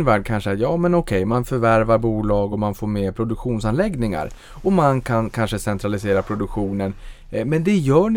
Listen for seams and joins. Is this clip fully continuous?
yes; 0 cuts

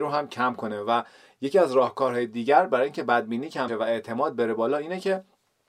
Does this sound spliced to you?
yes; 1 cut; at 3.7 s

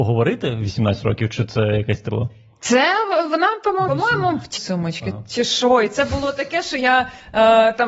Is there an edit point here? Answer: yes; 3 cuts; at 2.1 s, 3.9 s, 4.6 s

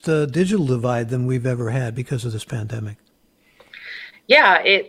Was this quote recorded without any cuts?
yes; 0 cuts

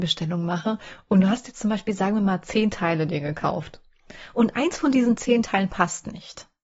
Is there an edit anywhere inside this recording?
no; 0 cuts

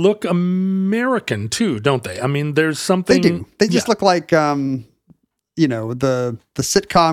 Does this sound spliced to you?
no; 0 cuts

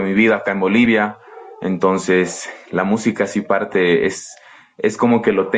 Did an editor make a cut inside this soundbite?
no; 0 cuts

